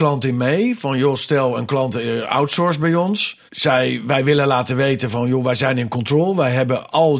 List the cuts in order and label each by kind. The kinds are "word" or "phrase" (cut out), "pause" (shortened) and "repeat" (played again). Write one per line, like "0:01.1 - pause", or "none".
0:03.5 - pause